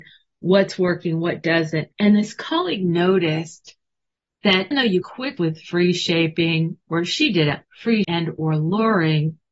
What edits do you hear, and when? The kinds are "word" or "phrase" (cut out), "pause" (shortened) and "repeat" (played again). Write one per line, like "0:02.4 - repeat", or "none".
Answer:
0:01.9 - pause
0:04.7 - word
0:05.0 - word
0:05.4 - word
0:06.8 - pause
0:07.6 - word
0:08.0 - word